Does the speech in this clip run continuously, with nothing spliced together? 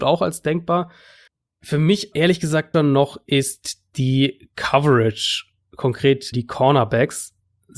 no; 4 cuts; at 1.3 s, 2.1 s, 2.7 s, 6.3 s

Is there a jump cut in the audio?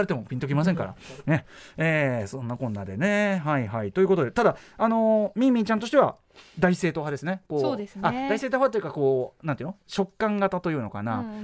no; 0 cuts

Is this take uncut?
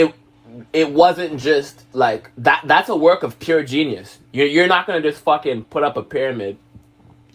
yes; 0 cuts

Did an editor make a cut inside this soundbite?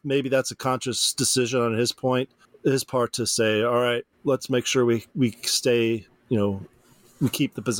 yes; 3 cuts; at 2.4 s, 4.1 s, 6.1 s

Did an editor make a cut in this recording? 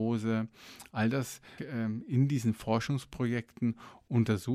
yes; 1 cut; at 1.6 s

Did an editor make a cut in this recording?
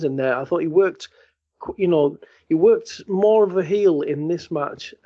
no; 0 cuts

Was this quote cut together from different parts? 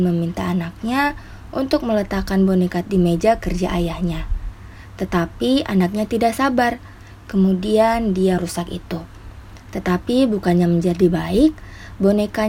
yes; 2 cuts; at 2.8 s, 8.4 s

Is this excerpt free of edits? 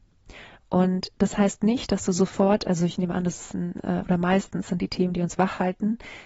yes; 0 cuts

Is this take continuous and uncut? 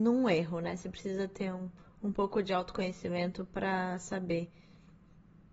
yes; 0 cuts

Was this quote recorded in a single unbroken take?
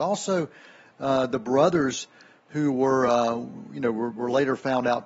yes; 0 cuts

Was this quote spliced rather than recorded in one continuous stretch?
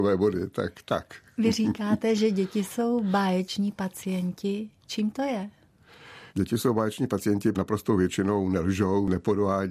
yes; 2 cuts; at 6.3 s, 7.5 s

